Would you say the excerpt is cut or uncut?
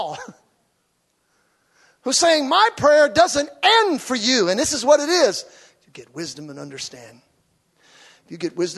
uncut